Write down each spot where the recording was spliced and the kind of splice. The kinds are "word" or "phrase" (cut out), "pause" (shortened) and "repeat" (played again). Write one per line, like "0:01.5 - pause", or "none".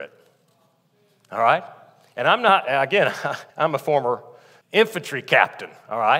0:03.5 - pause
0:04.6 - word